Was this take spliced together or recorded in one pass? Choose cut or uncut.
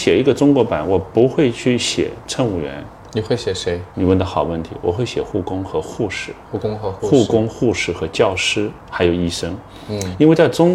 cut